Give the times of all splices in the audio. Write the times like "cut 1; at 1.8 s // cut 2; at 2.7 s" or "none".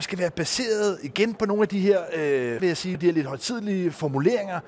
cut 1; at 2.6 s // cut 2; at 2.9 s